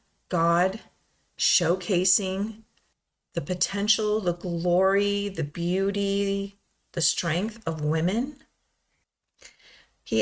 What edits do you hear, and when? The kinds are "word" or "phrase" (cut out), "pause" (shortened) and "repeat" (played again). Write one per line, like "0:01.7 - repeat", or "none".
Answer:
none